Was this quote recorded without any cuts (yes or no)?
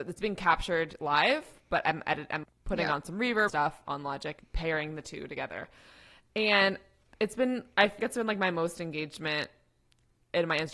no